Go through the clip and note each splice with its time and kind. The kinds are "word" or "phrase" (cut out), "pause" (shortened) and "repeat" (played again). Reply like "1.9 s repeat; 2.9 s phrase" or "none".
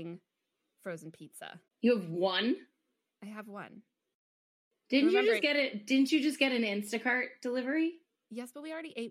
1.7 s pause